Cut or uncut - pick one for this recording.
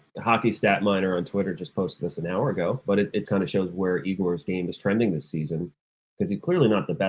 cut